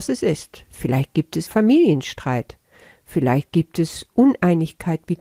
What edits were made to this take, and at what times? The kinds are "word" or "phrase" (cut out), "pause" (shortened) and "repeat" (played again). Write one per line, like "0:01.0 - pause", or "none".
0:01.5 - word

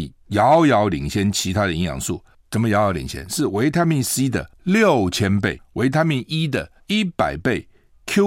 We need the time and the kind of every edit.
0:06.8 - pause

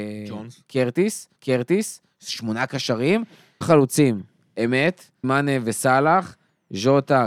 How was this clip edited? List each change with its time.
0:01.4 - repeat
0:03.6 - word
0:05.2 - word

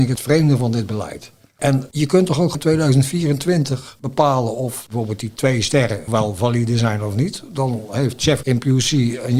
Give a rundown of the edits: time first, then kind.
0:02.5 - word
0:06.1 - word
0:08.4 - word

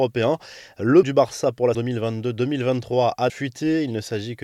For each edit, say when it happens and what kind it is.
0:01.0 - word
0:01.7 - word
0:03.3 - word

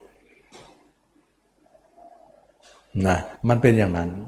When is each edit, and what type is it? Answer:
0:03.4 - pause

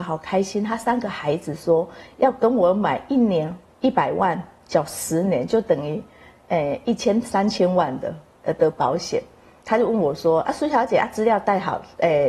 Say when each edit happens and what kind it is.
none

